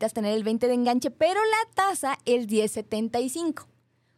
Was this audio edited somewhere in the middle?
no; 0 cuts

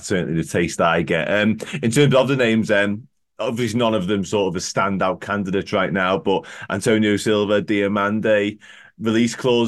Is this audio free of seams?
yes; 0 cuts

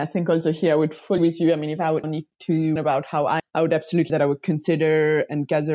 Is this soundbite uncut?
no; 5 cuts; at 1.2 s, 2.0 s, 2.8 s, 3.4 s, 4.1 s

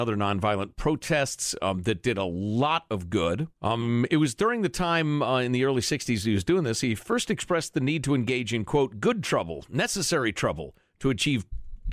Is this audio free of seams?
no; 1 cut; at 3.5 s

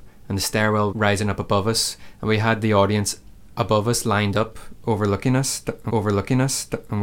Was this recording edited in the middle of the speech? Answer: yes; 2 cuts; at 0.9 s, 5.9 s

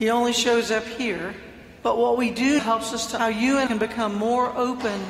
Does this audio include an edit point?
yes; 4 cuts; at 1.8 s, 2.6 s, 3.2 s, 3.7 s

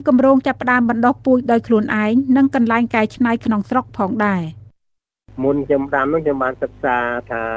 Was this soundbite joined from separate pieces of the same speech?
no; 0 cuts

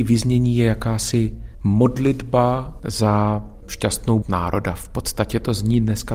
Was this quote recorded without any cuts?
no; 1 cut; at 4.2 s

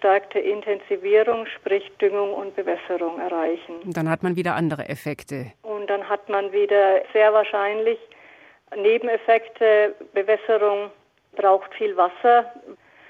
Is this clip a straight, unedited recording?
yes; 0 cuts

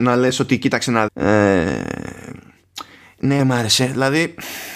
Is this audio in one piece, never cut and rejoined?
no; 2 cuts; at 1.1 s, 3.4 s

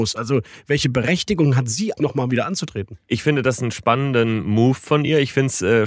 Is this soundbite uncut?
no; 1 cut; at 2.0 s

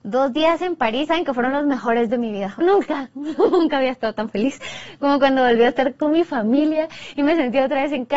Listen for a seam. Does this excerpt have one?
yes; 3 cuts; at 1.1 s, 2.1 s, 2.6 s

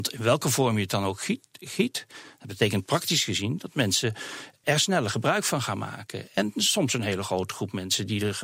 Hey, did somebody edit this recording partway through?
yes; 1 cut; at 4.6 s

